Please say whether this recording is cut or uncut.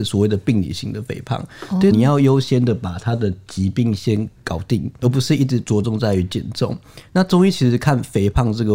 cut